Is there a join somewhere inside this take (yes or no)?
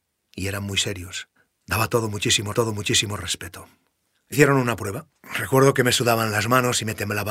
yes